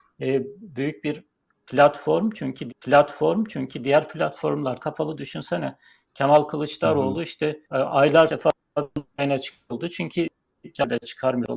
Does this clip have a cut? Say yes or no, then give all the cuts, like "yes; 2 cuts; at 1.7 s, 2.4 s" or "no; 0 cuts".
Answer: yes; 5 cuts; at 2.7 s, 4.8 s, 7.6 s, 8.3 s, 9.7 s